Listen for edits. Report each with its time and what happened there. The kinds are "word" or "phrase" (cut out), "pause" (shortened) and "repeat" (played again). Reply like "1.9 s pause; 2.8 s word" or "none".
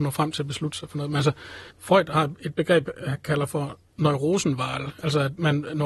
1.7 s pause